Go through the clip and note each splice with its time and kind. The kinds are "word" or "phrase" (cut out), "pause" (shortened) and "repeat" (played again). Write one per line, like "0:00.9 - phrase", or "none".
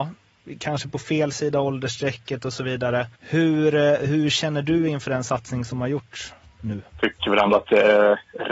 0:03.1 - pause
0:06.9 - pause